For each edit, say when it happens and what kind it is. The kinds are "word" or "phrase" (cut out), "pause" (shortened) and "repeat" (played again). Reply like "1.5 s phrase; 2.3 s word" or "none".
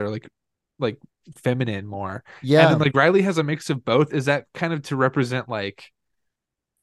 none